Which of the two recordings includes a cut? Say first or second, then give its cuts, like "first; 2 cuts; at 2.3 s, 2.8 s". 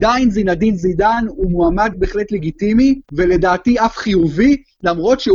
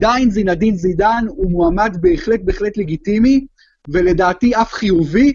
first; 2 cuts; at 1.9 s, 3.0 s